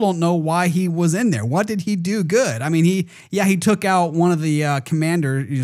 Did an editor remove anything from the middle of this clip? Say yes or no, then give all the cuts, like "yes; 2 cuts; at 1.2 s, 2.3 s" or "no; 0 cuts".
no; 0 cuts